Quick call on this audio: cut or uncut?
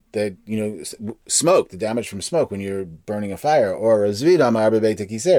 uncut